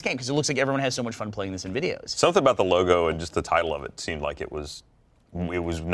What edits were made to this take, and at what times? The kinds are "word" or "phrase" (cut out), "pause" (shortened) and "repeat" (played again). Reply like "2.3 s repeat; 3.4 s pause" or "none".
none